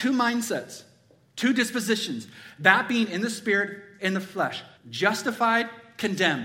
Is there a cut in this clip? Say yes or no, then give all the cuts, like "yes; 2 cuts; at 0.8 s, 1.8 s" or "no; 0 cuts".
yes; 1 cut; at 4.8 s